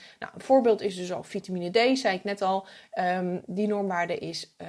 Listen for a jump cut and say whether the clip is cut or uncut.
uncut